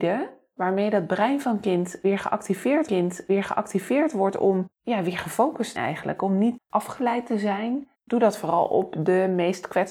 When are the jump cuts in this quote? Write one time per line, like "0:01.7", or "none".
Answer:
0:02.9
0:05.8
0:06.6
0:07.9